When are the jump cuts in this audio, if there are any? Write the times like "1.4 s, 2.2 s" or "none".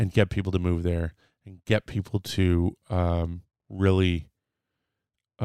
none